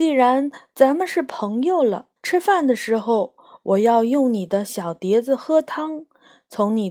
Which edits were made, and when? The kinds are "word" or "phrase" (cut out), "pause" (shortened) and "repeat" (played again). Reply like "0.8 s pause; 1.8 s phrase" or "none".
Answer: 2.2 s pause